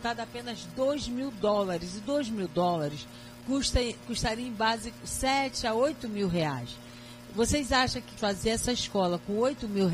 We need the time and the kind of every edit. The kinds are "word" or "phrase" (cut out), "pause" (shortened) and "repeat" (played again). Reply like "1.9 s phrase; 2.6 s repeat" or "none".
8.2 s word